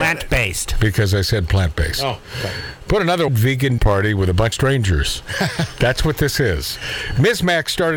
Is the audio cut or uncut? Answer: cut